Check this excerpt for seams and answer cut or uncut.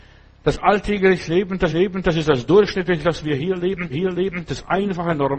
cut